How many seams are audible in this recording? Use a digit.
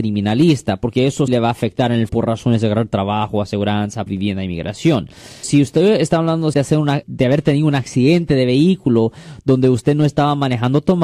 6